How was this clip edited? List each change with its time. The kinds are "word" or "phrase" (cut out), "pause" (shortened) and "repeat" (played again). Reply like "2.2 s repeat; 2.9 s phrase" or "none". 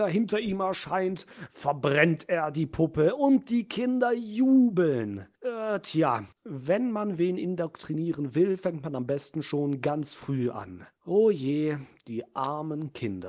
5.4 s pause; 6.3 s pause; 10.9 s pause